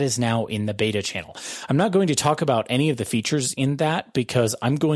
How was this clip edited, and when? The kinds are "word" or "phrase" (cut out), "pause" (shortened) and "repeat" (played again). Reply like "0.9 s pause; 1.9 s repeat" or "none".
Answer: none